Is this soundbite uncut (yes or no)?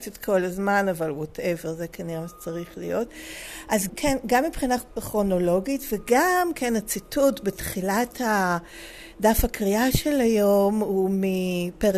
no